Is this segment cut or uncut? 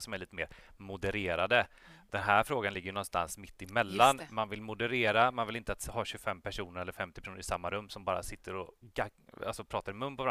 uncut